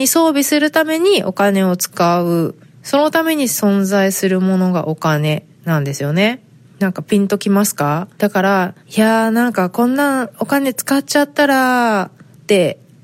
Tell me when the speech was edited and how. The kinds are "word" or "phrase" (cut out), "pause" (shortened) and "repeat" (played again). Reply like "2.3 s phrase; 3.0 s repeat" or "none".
2.6 s pause; 6.6 s pause; 8.1 s pause; 8.8 s pause